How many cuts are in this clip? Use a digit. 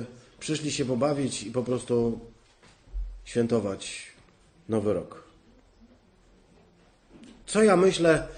0